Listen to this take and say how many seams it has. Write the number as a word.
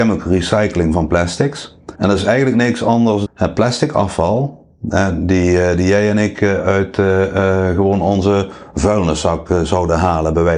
two